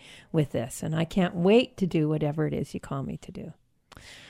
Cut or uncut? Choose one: uncut